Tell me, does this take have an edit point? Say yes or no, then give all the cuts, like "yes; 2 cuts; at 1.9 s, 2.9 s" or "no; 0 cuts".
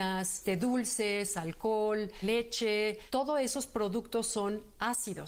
no; 0 cuts